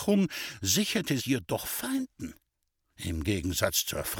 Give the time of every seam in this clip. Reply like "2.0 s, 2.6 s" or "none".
1.2 s, 1.6 s